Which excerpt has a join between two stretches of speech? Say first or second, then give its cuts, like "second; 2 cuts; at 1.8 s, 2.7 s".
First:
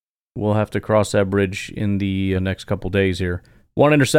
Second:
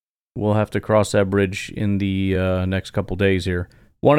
first; 1 cut; at 2.4 s